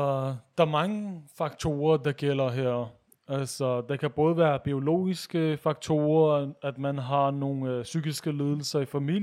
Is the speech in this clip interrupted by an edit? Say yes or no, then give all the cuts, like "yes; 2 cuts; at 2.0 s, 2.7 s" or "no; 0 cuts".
no; 0 cuts